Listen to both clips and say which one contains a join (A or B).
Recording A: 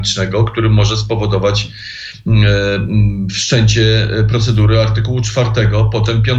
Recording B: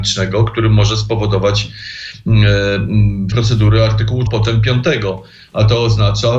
B